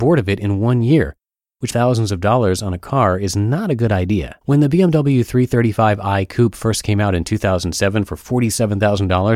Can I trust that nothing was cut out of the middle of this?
no; 2 cuts; at 1.7 s, 4.4 s

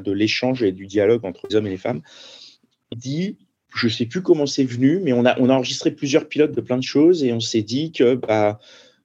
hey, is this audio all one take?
no; 2 cuts; at 1.5 s, 2.9 s

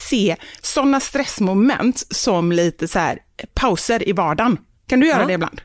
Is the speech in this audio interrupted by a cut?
no; 0 cuts

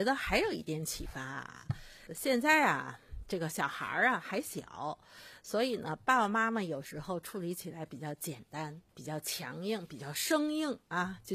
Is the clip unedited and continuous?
no; 2 cuts; at 2.1 s, 8.9 s

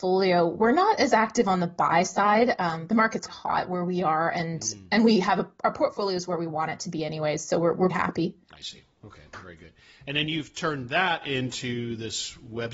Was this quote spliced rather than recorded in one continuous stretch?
yes; 2 cuts; at 3.3 s, 7.9 s

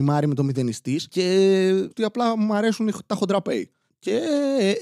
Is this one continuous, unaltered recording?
no; 1 cut; at 1.9 s

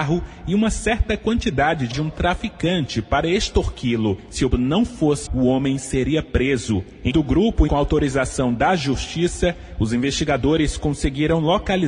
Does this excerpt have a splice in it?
yes; 5 cuts; at 1.9 s, 4.5 s, 5.3 s, 7.1 s, 7.7 s

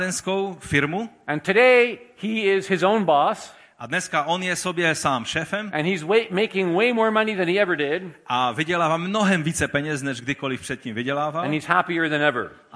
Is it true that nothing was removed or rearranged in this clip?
yes; 0 cuts

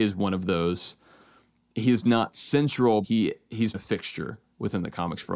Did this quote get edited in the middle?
yes; 2 cuts; at 3.0 s, 3.7 s

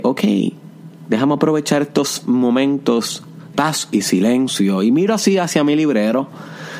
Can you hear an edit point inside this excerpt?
yes; 1 cut; at 3.5 s

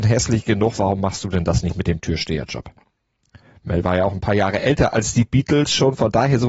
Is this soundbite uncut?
yes; 0 cuts

